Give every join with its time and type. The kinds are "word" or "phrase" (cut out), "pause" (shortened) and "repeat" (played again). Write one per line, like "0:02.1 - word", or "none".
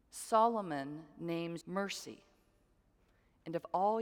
0:01.6 - word